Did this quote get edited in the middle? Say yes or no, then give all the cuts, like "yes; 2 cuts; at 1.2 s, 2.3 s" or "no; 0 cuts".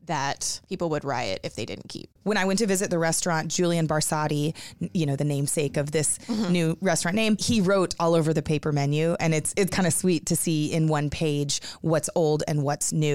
yes; 1 cut; at 9.7 s